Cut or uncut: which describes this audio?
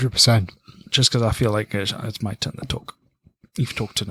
uncut